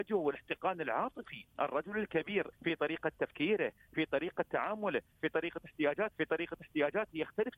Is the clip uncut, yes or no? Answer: no